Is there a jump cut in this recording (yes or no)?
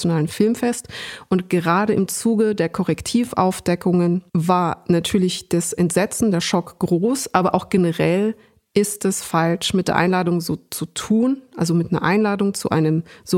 no